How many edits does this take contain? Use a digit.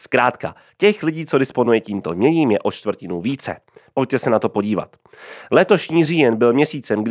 0